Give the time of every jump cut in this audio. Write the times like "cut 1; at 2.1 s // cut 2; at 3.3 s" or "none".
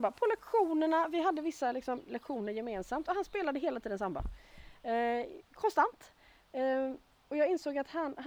cut 1; at 5.4 s